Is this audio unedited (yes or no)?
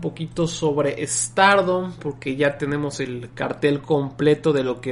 yes